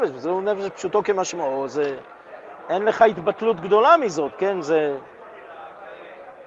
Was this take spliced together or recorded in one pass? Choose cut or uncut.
uncut